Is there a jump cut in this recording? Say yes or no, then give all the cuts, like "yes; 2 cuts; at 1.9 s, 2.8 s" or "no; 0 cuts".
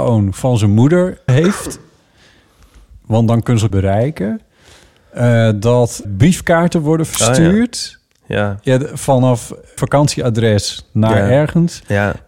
yes; 4 cuts; at 1.3 s, 3.7 s, 6.0 s, 9.8 s